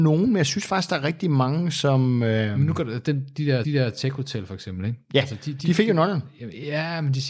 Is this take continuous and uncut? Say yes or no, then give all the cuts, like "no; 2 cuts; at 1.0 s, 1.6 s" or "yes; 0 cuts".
no; 1 cut; at 3.6 s